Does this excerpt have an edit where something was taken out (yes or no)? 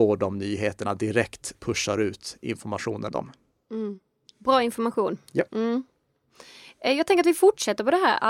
yes